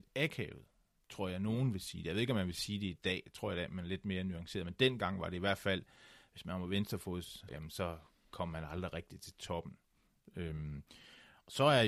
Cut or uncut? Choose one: cut